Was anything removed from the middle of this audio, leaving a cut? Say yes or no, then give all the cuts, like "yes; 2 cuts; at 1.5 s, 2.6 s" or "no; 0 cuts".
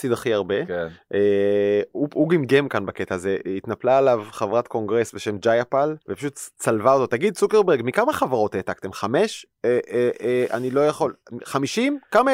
yes; 1 cut; at 6.0 s